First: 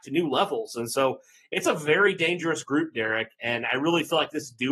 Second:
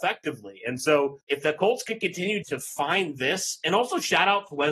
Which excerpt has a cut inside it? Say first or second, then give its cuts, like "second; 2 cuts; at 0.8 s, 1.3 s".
second; 2 cuts; at 1.2 s, 2.4 s